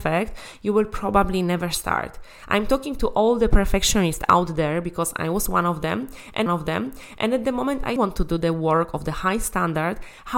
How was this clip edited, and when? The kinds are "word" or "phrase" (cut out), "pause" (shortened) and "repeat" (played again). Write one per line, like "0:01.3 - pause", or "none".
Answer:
0:06.5 - repeat
0:08.0 - word